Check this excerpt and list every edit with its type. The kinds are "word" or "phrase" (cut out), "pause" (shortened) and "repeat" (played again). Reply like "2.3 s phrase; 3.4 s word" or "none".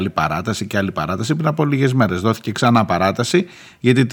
none